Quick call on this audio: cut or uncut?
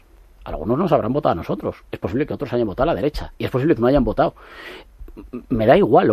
cut